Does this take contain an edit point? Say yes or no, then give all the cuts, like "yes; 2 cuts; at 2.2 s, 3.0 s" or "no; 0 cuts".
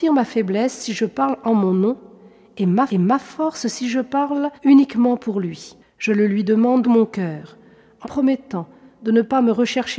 yes; 5 cuts; at 2.9 s, 4.6 s, 5.8 s, 6.8 s, 8.0 s